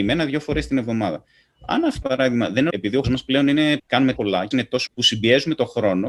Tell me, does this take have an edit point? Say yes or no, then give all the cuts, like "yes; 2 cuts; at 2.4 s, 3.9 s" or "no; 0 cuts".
yes; 7 cuts; at 2.0 s, 2.7 s, 3.0 s, 3.8 s, 4.2 s, 4.5 s, 4.9 s